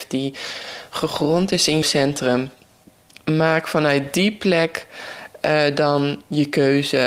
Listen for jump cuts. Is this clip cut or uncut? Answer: cut